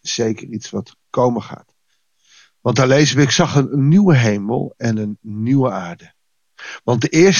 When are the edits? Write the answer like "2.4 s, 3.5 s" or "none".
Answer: none